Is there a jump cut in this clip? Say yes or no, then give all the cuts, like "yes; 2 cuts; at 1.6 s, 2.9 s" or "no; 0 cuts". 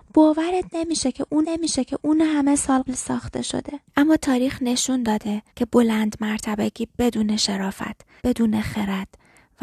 yes; 5 cuts; at 1.4 s, 2.9 s, 3.9 s, 5.5 s, 8.2 s